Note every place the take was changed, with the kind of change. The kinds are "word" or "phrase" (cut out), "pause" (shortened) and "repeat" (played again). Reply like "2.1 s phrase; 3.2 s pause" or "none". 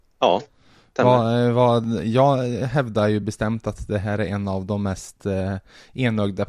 none